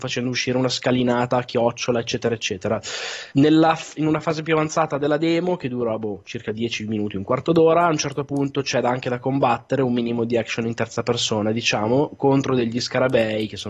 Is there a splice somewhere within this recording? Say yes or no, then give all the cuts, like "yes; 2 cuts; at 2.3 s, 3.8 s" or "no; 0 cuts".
yes; 1 cut; at 3.3 s